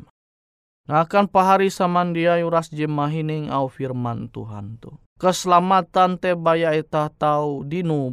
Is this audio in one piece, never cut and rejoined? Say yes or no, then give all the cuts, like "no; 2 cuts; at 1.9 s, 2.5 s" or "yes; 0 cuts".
no; 1 cut; at 5.1 s